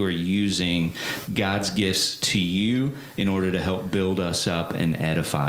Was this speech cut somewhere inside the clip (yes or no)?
no